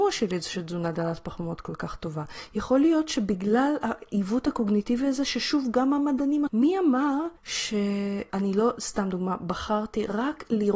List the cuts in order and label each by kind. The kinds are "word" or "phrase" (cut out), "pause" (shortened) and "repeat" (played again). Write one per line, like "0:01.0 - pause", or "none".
0:06.5 - phrase
0:07.4 - pause